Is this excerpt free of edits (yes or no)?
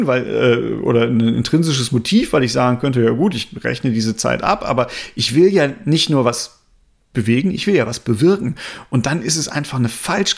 yes